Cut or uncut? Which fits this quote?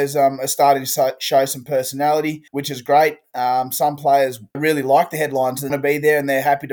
cut